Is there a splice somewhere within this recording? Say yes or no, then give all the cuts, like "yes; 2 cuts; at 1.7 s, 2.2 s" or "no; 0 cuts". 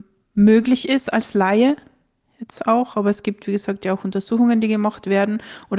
no; 0 cuts